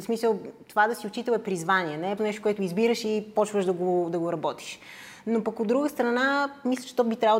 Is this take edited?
yes; 1 cut; at 2.2 s

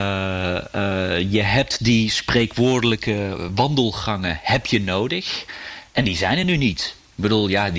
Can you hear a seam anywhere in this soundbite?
no; 0 cuts

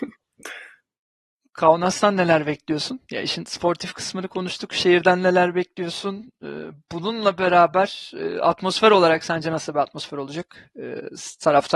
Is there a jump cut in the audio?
no; 0 cuts

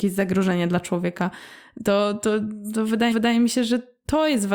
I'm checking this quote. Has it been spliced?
yes; 1 cut; at 3.1 s

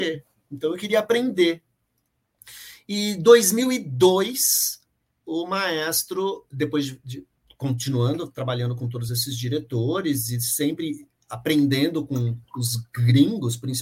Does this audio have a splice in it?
no; 0 cuts

